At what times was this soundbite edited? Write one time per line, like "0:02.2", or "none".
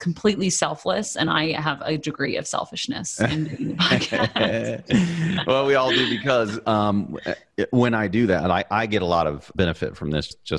none